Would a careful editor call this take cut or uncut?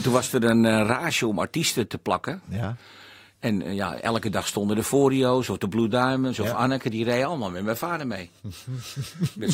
uncut